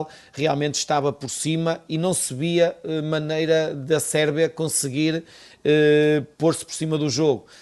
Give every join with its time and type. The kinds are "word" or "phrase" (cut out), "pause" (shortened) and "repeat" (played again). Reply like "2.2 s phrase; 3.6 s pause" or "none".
none